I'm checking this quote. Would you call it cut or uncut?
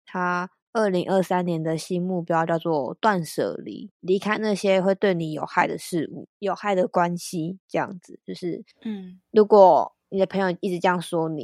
cut